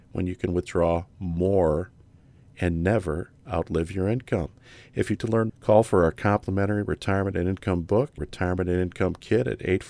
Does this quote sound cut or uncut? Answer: cut